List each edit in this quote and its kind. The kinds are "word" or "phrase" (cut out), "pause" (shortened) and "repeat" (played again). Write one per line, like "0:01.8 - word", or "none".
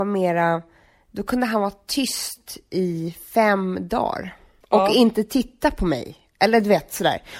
0:04.6 - pause